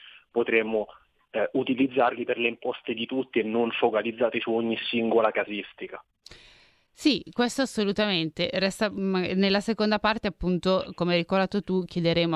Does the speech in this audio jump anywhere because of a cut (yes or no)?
no